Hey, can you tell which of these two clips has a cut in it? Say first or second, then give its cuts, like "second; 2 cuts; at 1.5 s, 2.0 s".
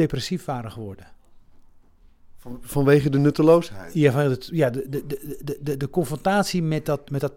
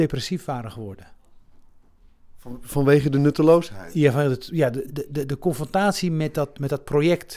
second; 1 cut; at 4.9 s